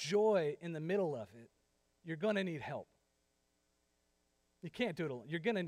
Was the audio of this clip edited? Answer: no; 0 cuts

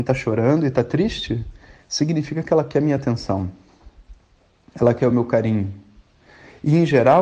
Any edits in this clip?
no; 0 cuts

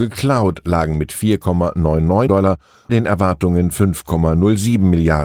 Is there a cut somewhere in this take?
yes; 3 cuts; at 2.3 s, 2.9 s, 3.7 s

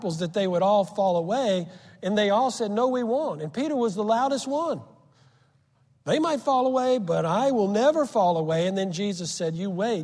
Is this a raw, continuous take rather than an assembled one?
yes; 0 cuts

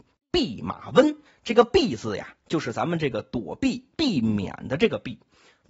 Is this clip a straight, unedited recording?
no; 2 cuts; at 1.2 s, 3.9 s

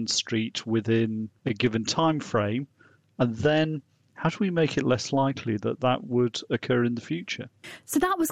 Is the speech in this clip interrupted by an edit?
no; 0 cuts

